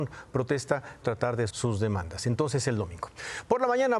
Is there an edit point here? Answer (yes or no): yes